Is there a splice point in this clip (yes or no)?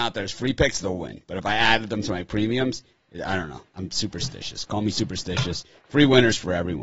yes